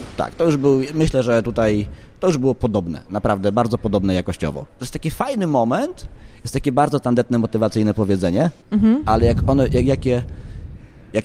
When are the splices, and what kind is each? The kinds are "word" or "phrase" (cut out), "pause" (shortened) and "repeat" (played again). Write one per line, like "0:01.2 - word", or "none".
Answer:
0:08.6 - pause